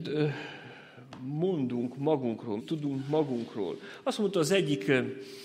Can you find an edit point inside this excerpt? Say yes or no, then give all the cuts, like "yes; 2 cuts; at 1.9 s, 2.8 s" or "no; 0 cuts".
yes; 1 cut; at 2.6 s